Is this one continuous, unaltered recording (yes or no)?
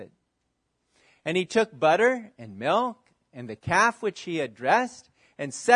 yes